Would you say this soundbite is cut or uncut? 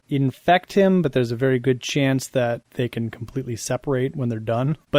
uncut